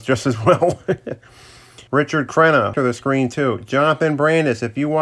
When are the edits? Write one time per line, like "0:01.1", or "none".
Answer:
0:01.9
0:02.7